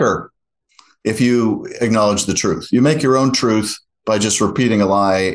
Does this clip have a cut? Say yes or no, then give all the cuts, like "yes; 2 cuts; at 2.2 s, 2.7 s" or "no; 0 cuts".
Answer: no; 0 cuts